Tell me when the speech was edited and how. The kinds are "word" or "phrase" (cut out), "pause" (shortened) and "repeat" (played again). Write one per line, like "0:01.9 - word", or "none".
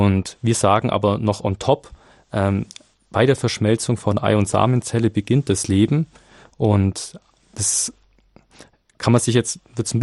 none